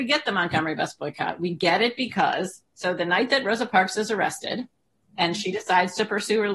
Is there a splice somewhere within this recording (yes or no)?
no